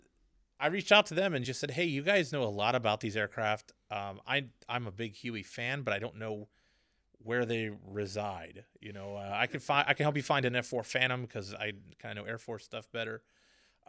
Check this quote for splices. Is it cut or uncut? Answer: uncut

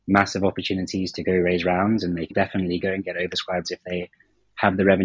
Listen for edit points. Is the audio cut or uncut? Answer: cut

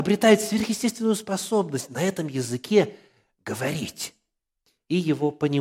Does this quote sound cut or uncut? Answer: uncut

